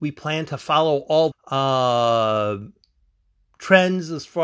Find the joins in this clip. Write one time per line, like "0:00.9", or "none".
0:01.3